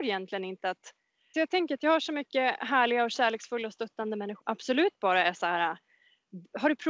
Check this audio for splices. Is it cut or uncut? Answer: cut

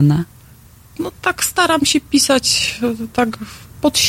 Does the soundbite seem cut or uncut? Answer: uncut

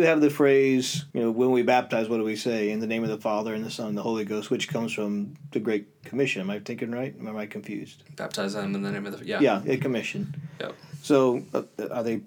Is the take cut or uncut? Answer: cut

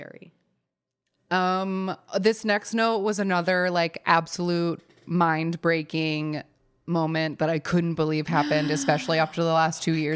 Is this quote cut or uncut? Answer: uncut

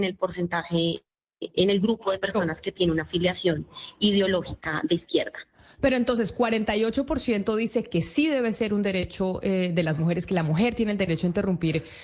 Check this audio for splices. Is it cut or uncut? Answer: uncut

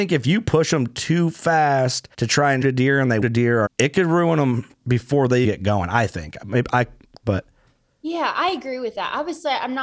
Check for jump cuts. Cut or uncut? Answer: cut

